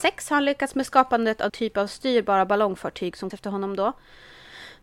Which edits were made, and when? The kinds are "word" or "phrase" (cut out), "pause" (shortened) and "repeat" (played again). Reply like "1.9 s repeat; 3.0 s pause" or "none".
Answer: 1.5 s word; 3.3 s word